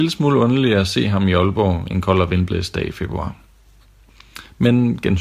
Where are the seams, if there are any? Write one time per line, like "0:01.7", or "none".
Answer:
none